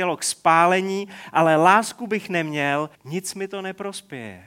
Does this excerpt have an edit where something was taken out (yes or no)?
yes